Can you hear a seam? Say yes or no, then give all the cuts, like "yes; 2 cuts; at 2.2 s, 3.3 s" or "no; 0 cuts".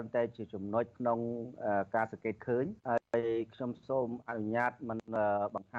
yes; 2 cuts; at 0.9 s, 2.8 s